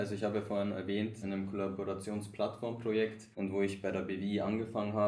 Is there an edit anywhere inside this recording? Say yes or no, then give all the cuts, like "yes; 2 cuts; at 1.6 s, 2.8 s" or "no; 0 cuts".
yes; 2 cuts; at 1.2 s, 3.3 s